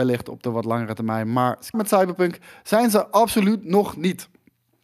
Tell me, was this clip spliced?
yes; 1 cut; at 1.7 s

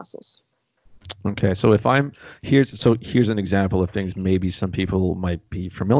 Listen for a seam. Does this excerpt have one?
no; 0 cuts

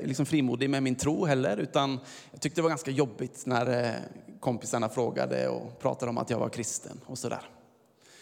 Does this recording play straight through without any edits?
yes; 0 cuts

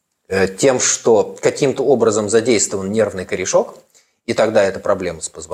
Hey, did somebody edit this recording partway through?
no; 0 cuts

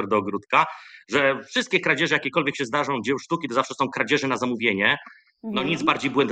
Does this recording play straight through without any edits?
yes; 0 cuts

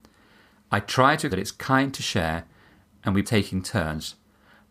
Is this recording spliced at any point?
yes; 2 cuts; at 1.3 s, 3.2 s

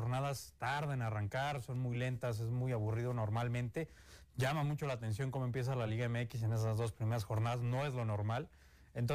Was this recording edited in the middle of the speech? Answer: no; 0 cuts

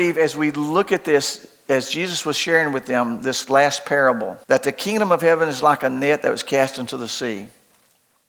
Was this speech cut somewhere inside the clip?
yes; 1 cut; at 4.4 s

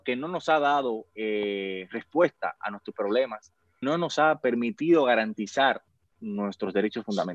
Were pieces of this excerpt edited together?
yes; 3 cuts; at 1.1 s, 2.9 s, 3.8 s

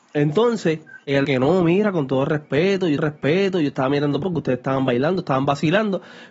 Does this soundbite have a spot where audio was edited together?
yes; 3 cuts; at 1.2 s, 3.0 s, 4.2 s

